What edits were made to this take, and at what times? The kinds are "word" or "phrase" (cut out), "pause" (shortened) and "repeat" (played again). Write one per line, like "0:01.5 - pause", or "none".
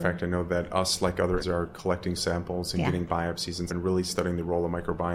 0:01.4 - word
0:02.2 - word
0:03.7 - word